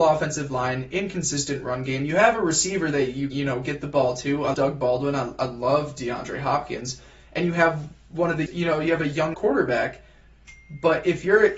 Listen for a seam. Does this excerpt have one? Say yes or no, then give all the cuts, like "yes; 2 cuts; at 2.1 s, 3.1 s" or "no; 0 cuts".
yes; 4 cuts; at 3.3 s, 4.5 s, 8.5 s, 9.3 s